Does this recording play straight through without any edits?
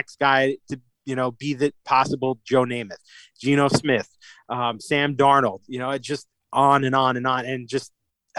yes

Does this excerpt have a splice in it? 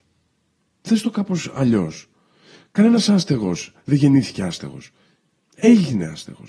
no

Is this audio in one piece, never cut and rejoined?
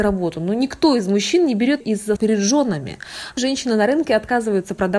no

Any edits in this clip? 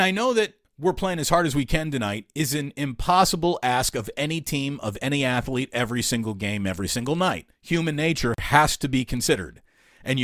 yes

